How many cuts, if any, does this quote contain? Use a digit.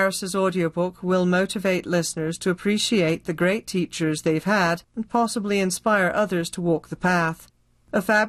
1